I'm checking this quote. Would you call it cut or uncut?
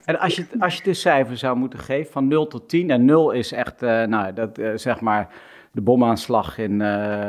uncut